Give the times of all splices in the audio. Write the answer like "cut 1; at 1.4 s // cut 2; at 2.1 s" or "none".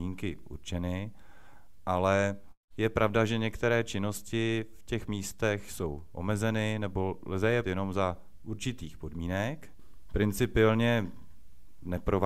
cut 1; at 7.6 s